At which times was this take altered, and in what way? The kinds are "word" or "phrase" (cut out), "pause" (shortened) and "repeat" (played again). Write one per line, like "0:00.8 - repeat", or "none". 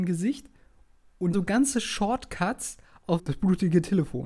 0:01.3 - word
0:03.2 - word